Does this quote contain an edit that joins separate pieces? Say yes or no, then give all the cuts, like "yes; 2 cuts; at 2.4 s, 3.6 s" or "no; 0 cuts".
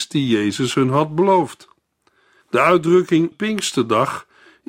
yes; 1 cut; at 3.3 s